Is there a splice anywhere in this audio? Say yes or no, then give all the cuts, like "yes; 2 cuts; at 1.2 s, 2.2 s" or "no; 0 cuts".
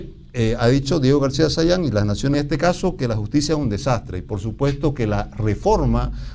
yes; 1 cut; at 2.3 s